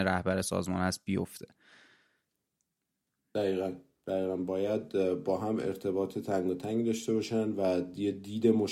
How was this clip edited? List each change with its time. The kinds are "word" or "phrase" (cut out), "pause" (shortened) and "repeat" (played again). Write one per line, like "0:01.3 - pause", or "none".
none